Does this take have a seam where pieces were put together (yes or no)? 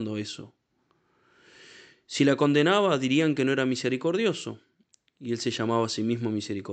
no